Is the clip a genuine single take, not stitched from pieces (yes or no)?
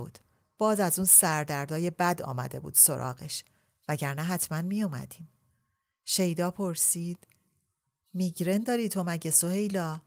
yes